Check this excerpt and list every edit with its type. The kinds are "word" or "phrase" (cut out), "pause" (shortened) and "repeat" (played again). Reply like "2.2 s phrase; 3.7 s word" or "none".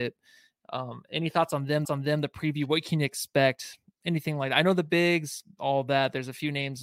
1.8 s repeat